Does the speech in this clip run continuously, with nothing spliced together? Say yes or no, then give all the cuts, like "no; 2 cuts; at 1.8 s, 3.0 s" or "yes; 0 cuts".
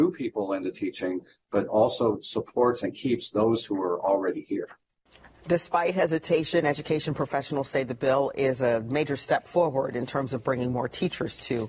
yes; 0 cuts